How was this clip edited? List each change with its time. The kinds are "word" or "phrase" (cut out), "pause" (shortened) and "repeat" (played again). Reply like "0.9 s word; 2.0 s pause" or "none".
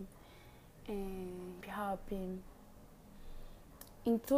1.6 s word